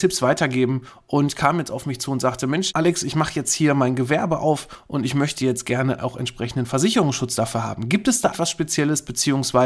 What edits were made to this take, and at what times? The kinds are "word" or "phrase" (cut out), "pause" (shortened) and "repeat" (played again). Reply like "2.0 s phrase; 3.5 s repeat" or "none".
8.3 s word